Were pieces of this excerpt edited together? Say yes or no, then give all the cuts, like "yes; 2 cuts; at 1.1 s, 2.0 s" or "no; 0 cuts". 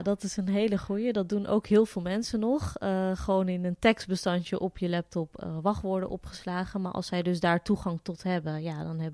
no; 0 cuts